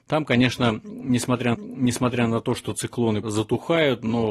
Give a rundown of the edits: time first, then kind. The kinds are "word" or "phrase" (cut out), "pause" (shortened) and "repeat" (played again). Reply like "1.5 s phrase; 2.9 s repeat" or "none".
1.5 s repeat; 3.2 s word